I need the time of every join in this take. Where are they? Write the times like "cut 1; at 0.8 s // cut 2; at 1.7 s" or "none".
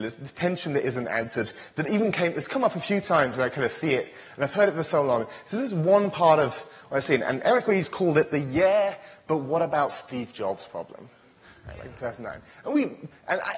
none